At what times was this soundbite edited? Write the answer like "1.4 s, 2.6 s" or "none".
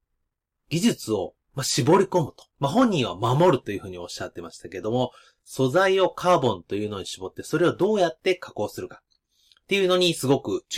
1.4 s, 2.5 s